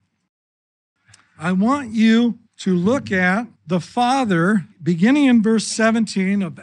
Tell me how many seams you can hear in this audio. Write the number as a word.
three